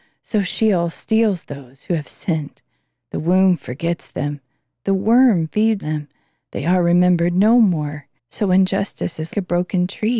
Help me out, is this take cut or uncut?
cut